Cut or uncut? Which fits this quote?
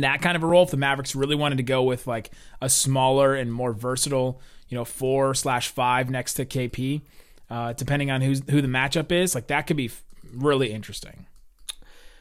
uncut